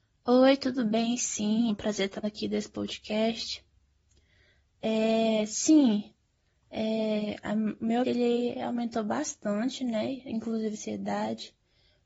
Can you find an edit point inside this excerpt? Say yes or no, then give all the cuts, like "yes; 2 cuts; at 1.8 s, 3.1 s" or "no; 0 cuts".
yes; 4 cuts; at 1.7 s, 2.2 s, 8.0 s, 10.7 s